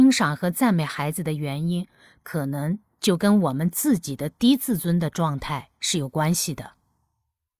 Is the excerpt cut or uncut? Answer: uncut